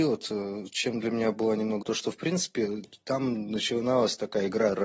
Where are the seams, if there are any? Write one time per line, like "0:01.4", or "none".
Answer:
0:01.8